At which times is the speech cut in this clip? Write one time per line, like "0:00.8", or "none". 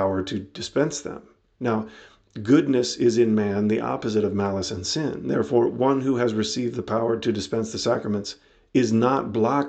none